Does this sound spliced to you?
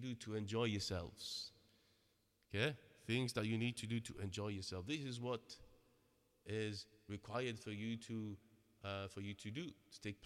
no; 0 cuts

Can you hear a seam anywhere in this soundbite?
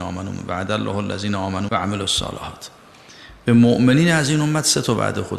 yes; 1 cut; at 1.7 s

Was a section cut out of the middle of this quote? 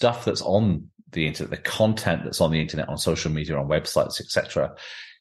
no; 0 cuts

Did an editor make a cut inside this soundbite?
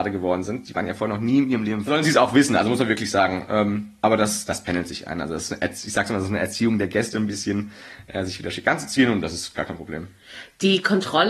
yes; 1 cut; at 1.9 s

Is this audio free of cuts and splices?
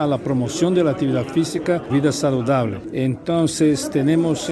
no; 1 cut; at 1.9 s

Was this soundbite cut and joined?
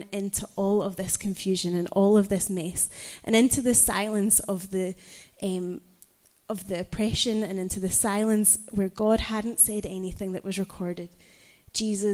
no; 0 cuts

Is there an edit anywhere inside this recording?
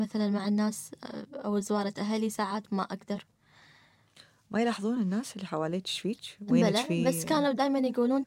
no; 0 cuts

